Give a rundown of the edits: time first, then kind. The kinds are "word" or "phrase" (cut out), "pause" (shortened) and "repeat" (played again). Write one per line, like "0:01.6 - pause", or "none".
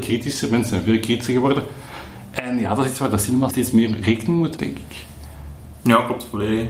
0:03.5 - word
0:04.6 - word